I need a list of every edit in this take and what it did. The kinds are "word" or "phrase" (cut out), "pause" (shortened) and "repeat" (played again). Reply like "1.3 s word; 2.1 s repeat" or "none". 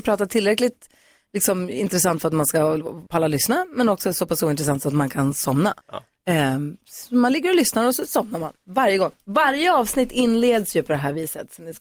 3.1 s pause; 5.8 s pause